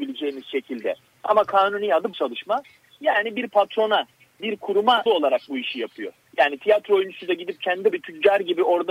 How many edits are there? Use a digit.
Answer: 4